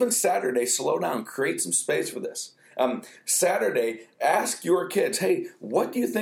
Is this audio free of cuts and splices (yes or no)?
yes